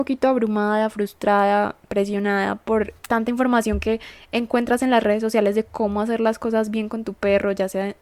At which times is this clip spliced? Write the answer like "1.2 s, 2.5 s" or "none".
3.0 s